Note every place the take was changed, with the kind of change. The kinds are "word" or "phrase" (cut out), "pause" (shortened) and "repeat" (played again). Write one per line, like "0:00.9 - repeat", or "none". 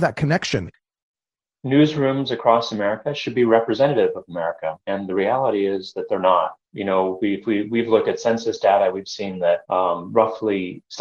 0:04.8 - pause
0:06.6 - pause
0:09.6 - pause